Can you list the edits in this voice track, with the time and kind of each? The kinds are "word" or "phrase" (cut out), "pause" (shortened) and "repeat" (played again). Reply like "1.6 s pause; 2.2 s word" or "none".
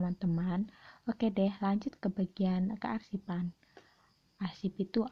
none